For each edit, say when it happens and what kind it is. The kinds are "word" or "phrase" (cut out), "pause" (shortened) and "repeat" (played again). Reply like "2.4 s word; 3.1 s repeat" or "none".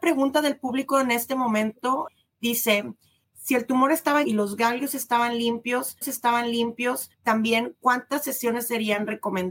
4.2 s word; 6.0 s repeat